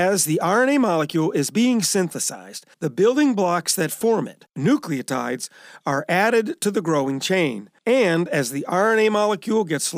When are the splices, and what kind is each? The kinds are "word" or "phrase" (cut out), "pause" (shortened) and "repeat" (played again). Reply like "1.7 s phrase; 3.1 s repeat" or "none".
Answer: 2.7 s pause; 4.5 s pause; 7.8 s pause